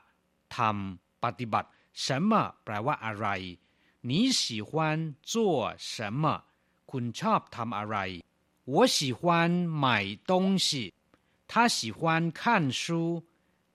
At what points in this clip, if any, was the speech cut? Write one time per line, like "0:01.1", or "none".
none